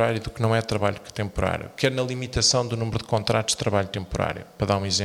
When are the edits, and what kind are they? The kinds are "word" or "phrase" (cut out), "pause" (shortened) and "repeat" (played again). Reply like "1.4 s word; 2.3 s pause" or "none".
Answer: none